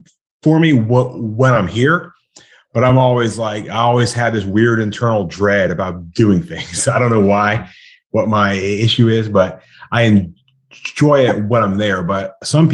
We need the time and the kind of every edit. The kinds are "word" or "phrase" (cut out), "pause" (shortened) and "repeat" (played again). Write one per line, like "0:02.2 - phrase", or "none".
none

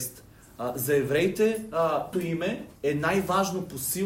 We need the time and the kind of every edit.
0:02.1 - word
0:02.7 - pause

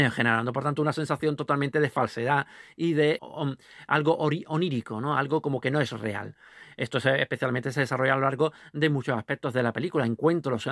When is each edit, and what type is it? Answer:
0:03.2 - word

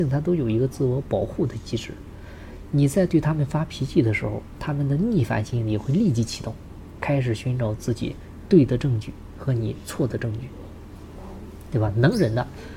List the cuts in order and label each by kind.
0:07.0 - word

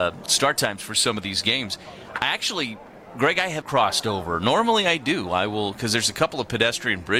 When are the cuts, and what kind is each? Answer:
0:03.6 - word

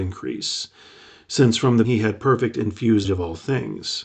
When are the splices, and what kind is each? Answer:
0:01.8 - word
0:03.0 - word

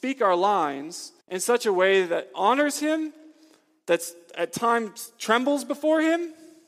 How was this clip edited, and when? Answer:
0:01.2 - pause

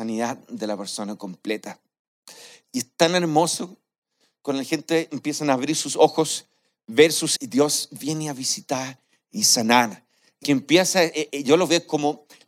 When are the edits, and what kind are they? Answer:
0:07.4 - word
0:10.4 - word

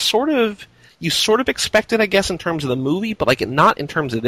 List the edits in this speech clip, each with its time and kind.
none

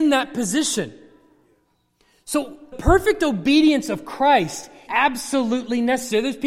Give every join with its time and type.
0:02.7 - word
0:04.9 - word

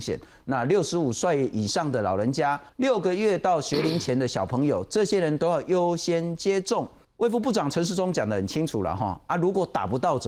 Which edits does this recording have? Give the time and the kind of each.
0:02.7 - pause
0:07.0 - pause

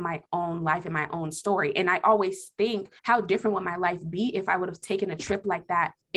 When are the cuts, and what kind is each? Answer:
0:03.0 - pause

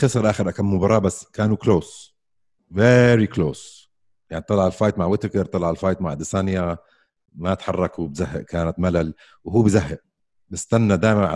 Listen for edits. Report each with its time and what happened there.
none

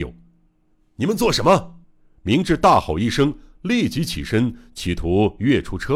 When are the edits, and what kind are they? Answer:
0:01.8 - pause

